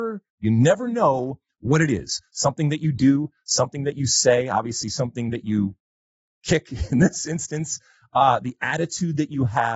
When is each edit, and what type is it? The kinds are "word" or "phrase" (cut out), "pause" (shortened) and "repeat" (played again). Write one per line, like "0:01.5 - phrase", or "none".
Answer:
none

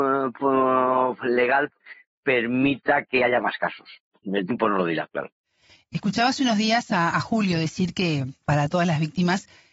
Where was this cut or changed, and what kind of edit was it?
none

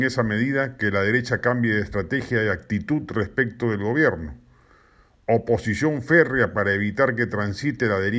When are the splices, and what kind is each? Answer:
none

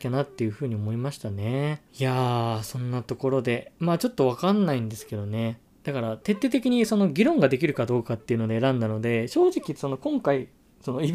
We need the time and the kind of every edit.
0:01.9 - pause

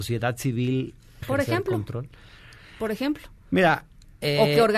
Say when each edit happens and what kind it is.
0:01.2 - word

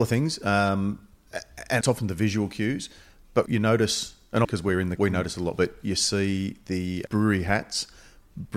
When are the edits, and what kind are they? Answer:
0:01.8 - word
0:03.5 - word
0:04.4 - word
0:05.0 - word
0:05.5 - word
0:07.1 - word

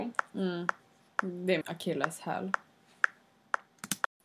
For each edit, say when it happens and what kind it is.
0:01.6 - word

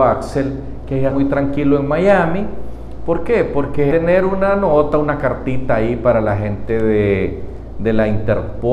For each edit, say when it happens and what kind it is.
0:01.1 - word
0:03.9 - phrase

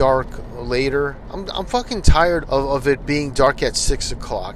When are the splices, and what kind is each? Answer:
0:02.4 - word

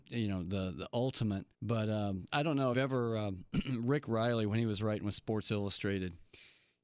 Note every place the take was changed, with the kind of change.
0:01.5 - pause
0:02.3 - word
0:02.7 - phrase

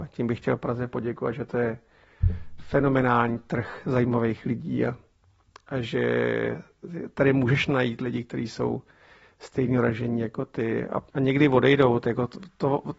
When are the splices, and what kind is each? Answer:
0:11.1 - pause

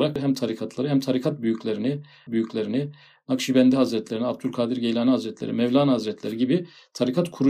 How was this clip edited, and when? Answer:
0:02.3 - repeat

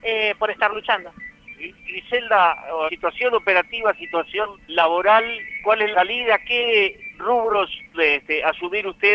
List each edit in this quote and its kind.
0:02.9 - word
0:04.7 - word
0:05.9 - word
0:07.9 - word

